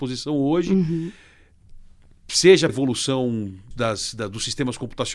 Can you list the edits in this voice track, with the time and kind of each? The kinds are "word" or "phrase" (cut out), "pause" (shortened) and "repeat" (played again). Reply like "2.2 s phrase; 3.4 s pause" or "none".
2.7 s word; 3.7 s word